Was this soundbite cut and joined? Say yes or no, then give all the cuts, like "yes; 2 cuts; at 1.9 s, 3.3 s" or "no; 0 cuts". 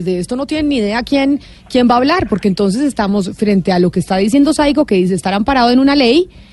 no; 0 cuts